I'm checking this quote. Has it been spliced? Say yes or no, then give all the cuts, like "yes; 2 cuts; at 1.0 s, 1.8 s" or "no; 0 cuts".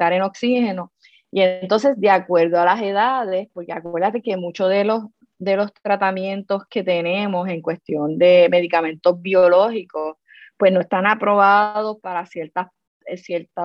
no; 0 cuts